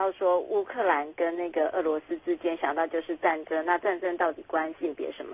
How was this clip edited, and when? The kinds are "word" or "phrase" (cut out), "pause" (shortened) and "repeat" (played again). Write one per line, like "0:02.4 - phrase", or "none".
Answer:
none